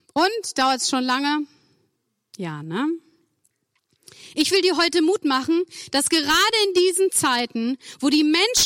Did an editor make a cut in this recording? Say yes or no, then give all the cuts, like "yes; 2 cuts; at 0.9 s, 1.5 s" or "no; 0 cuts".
no; 0 cuts